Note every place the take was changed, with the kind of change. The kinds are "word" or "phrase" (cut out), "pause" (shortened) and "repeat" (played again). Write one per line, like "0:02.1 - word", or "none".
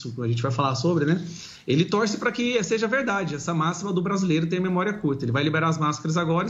none